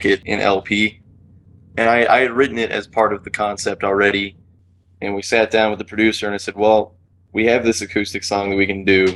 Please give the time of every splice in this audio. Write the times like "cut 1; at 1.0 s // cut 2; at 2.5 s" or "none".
none

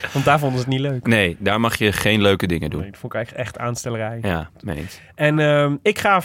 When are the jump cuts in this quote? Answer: none

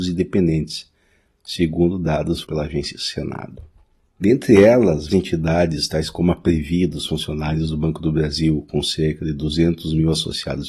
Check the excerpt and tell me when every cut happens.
cut 1; at 2.4 s // cut 2; at 5.1 s

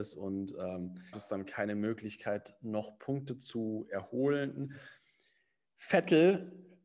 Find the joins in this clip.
cut 1; at 1.1 s

